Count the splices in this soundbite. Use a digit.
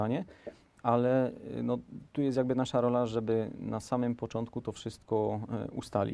1